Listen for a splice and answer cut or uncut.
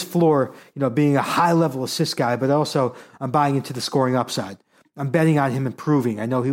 uncut